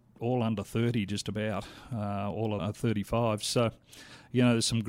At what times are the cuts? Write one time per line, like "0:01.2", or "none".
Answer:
0:02.6